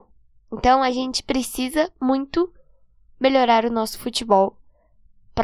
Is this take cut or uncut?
uncut